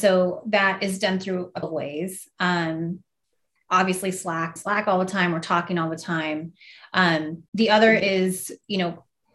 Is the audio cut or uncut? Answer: cut